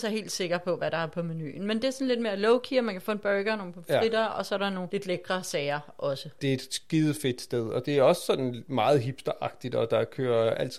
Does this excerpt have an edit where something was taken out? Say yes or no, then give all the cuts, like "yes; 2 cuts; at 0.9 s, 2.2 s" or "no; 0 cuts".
no; 0 cuts